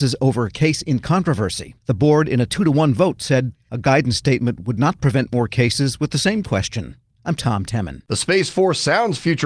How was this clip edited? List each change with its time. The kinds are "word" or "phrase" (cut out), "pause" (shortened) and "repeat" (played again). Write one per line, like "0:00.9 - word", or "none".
0:01.8 - pause